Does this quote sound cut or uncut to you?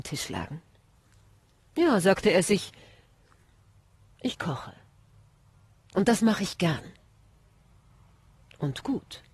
uncut